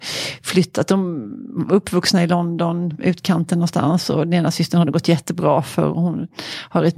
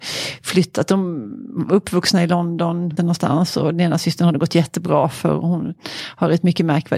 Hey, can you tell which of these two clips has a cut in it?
second; 1 cut; at 3.0 s

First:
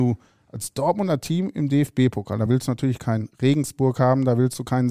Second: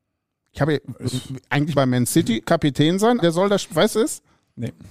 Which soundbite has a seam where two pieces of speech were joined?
second; 3 cuts; at 1.7 s, 3.2 s, 3.9 s

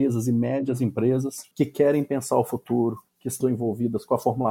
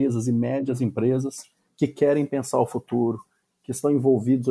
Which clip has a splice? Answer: first; 3 cuts; at 1.5 s, 3.1 s, 3.4 s

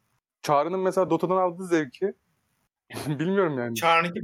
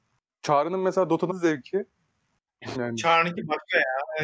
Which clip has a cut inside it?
second; 2 cuts; at 1.3 s, 2.7 s

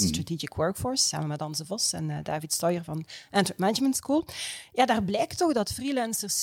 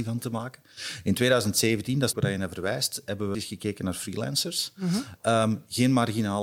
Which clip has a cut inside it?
second; 2 cuts; at 2.1 s, 3.3 s

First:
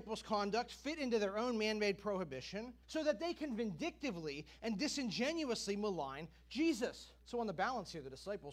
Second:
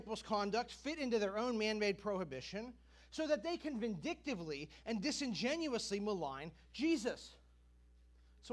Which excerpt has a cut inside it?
first; 2 cuts; at 2.8 s, 7.2 s

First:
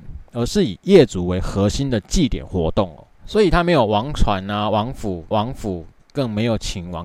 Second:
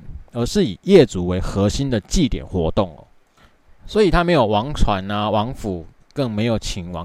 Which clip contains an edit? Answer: first; 2 cuts; at 3.1 s, 5.3 s

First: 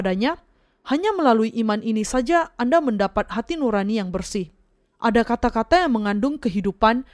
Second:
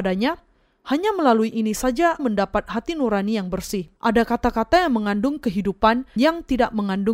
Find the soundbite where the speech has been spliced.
second; 4 cuts; at 1.5 s, 2.2 s, 4.0 s, 6.2 s

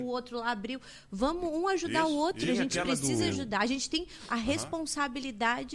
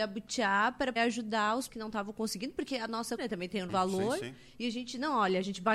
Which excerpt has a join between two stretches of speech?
second; 4 cuts; at 1.0 s, 1.7 s, 3.2 s, 3.7 s

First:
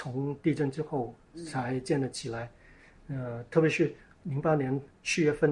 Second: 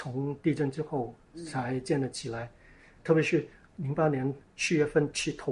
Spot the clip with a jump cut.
second; 1 cut; at 3.0 s

